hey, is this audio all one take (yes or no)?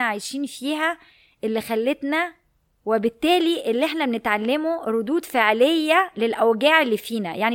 no